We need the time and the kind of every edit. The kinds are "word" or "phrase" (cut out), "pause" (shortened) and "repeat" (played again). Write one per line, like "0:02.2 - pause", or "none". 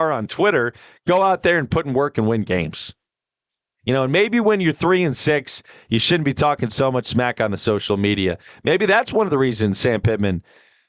none